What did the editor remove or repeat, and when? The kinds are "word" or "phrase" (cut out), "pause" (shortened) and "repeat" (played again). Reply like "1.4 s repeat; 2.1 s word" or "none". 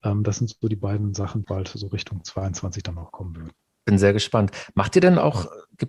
1.4 s word